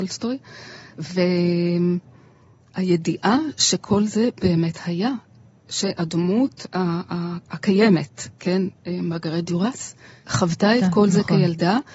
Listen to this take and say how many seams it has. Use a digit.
0